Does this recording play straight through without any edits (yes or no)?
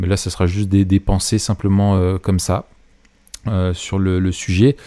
yes